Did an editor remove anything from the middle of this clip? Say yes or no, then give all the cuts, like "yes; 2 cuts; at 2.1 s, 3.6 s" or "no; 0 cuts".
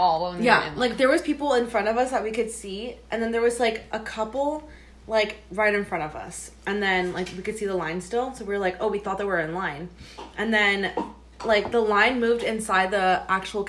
no; 0 cuts